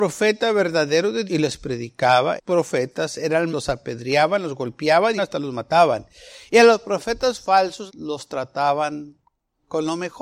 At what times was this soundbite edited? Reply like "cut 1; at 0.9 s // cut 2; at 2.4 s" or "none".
cut 1; at 1.3 s // cut 2; at 2.4 s // cut 3; at 3.5 s // cut 4; at 5.2 s // cut 5; at 7.9 s